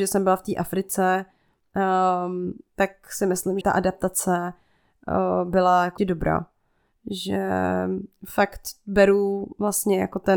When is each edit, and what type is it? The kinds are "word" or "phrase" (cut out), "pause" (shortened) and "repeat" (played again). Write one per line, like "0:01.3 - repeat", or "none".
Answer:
0:03.6 - phrase
0:06.0 - word